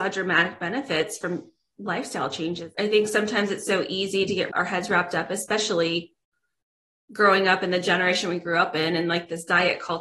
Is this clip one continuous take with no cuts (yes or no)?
yes